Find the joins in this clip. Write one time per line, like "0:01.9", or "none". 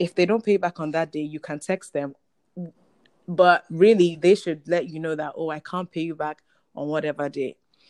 none